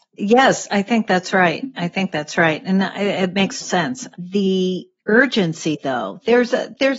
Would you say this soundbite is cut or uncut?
cut